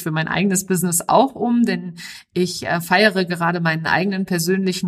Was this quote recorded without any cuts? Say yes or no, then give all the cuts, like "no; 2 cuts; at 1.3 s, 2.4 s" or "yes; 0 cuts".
yes; 0 cuts